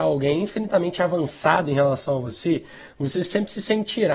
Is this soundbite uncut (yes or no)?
yes